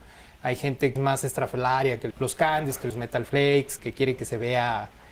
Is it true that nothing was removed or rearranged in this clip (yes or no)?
no